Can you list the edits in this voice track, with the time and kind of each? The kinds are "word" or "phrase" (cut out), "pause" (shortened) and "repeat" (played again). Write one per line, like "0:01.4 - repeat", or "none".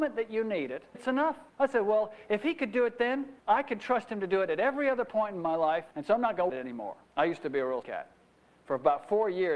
0:00.9 - word
0:01.5 - pause
0:03.4 - pause
0:05.9 - pause
0:06.5 - phrase
0:07.0 - pause
0:07.8 - word

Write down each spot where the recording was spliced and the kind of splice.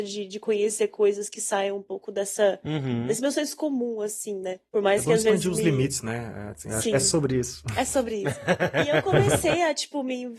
none

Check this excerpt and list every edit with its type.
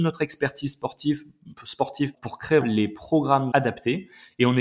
0:02.1 - word
0:02.6 - word
0:03.5 - word

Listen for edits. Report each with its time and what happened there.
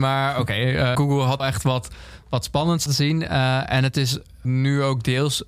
0:00.9 - word
0:01.4 - word
0:02.9 - word
0:04.4 - word

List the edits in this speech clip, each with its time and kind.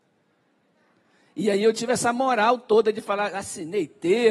none

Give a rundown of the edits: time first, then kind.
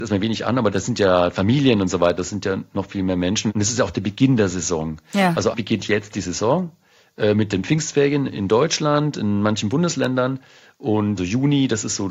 0:05.5 - word
0:08.3 - word
0:11.2 - word

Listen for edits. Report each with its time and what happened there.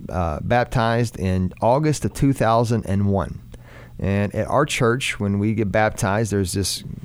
none

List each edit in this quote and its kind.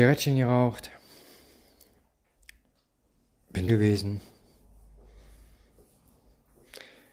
0:03.7 - word

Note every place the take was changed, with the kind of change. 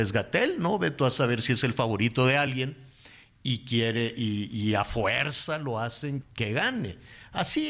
0:06.2 - word

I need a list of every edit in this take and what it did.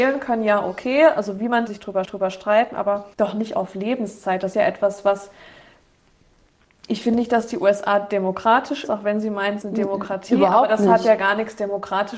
0:01.7 - phrase
0:02.0 - repeat
0:03.1 - pause
0:04.5 - word
0:08.8 - word
0:09.6 - phrase

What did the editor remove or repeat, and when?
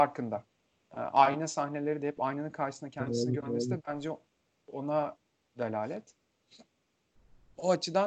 none

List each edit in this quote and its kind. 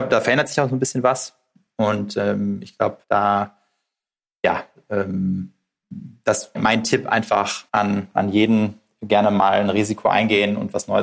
0:03.0 - pause
0:06.5 - word
0:07.7 - pause

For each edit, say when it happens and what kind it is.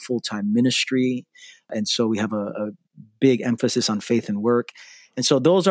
none

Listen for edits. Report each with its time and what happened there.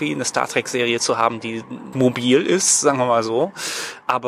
0:01.9 - word

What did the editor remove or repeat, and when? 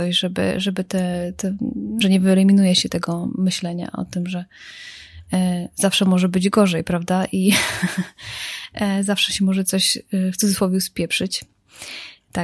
0:02.0 - phrase
0:02.9 - word

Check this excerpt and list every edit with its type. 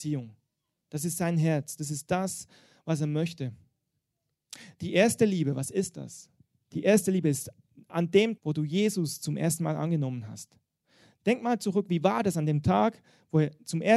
0:08.4 - word

